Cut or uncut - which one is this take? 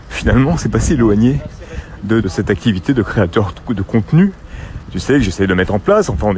cut